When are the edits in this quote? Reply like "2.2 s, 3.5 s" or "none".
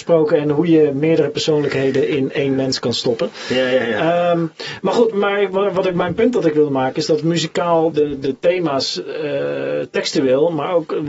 5.1 s, 7.9 s